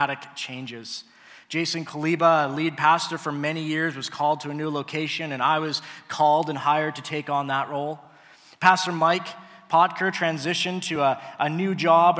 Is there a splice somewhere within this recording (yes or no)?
no